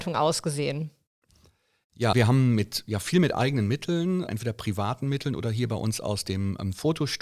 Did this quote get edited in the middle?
yes; 2 cuts; at 2.1 s, 4.3 s

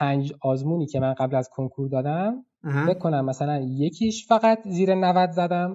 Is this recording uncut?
no; 1 cut; at 2.5 s

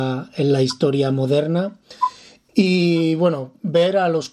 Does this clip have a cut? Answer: no; 0 cuts

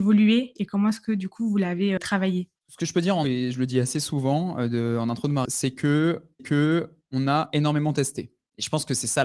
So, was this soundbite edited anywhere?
yes; 5 cuts; at 2.0 s, 2.6 s, 3.2 s, 5.5 s, 6.4 s

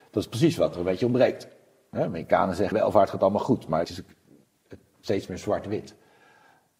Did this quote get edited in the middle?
yes; 3 cuts; at 2.7 s, 3.8 s, 5.0 s

